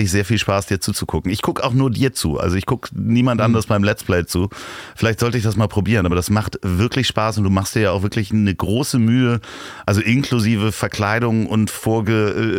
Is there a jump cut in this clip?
no; 0 cuts

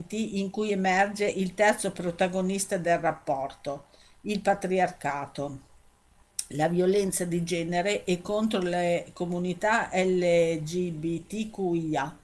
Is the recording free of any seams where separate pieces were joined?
yes; 0 cuts

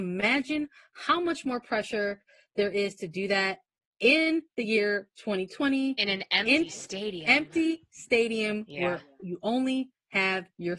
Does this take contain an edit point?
no; 0 cuts

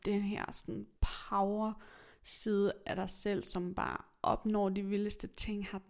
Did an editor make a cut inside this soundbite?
yes; 1 cut; at 1.0 s

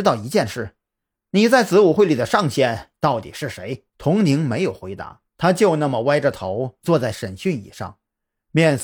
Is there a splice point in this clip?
yes; 2 cuts; at 3.9 s, 5.3 s

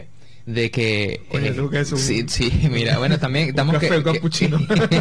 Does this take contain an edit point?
no; 0 cuts

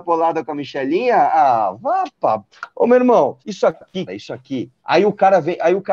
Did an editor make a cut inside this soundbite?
yes; 4 cuts; at 2.7 s, 3.4 s, 4.1 s, 4.8 s

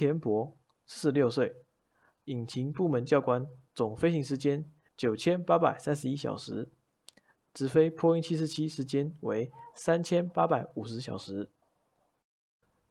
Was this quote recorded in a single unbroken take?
no; 2 cuts; at 3.7 s, 4.9 s

